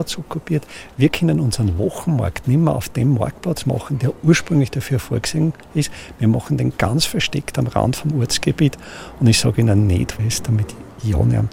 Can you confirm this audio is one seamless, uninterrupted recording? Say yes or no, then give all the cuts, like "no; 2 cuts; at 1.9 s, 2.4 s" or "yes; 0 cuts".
no; 1 cut; at 10.2 s